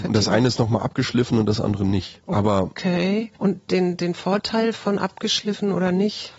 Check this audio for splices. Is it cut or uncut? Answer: uncut